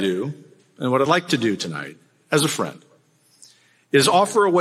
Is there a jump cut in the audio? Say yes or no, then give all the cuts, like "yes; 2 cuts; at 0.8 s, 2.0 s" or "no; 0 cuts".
no; 0 cuts